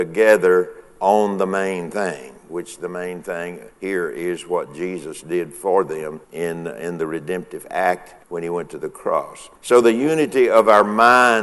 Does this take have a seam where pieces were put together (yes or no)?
yes